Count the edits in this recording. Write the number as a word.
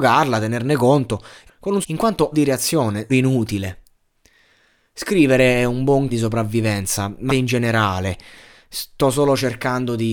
six